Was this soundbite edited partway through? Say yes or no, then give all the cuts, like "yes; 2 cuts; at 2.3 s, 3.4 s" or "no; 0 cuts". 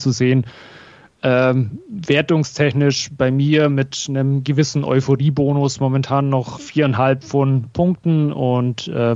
yes; 2 cuts; at 6.6 s, 7.7 s